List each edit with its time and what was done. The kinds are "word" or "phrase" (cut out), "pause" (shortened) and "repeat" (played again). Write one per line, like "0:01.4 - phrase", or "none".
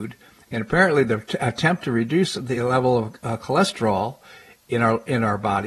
none